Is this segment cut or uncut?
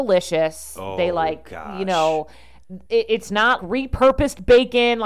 cut